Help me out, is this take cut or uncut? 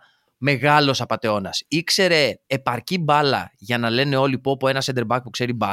cut